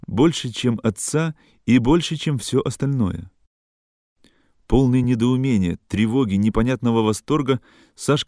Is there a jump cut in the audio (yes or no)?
no